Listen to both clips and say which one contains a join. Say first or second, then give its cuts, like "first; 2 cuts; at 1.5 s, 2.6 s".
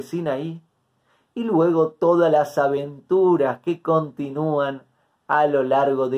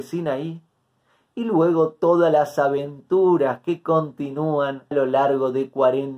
second; 1 cut; at 4.9 s